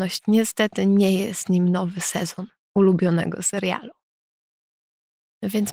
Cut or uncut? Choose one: uncut